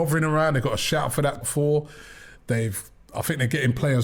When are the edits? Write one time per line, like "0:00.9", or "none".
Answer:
0:01.4